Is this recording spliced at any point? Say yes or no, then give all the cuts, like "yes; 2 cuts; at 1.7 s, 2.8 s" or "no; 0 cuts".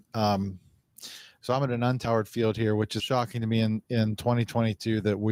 yes; 1 cut; at 3.0 s